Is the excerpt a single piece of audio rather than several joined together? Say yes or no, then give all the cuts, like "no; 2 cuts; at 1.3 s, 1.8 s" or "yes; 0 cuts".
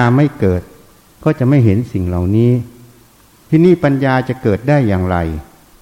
no; 1 cut; at 3.2 s